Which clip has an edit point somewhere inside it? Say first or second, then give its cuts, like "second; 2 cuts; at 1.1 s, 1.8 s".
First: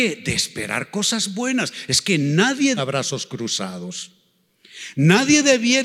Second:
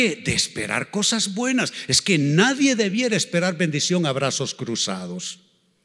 first; 1 cut; at 2.8 s